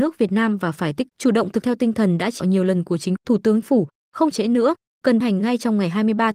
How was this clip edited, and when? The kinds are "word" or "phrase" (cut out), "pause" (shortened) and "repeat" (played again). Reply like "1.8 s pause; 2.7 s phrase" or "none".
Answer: 1.1 s word; 1.6 s word; 2.4 s word; 3.2 s word; 3.6 s word; 4.3 s word; 5.2 s word